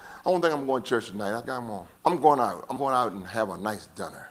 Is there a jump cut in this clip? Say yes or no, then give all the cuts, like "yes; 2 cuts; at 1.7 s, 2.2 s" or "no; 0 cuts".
yes; 3 cuts; at 1.4 s, 2.0 s, 2.8 s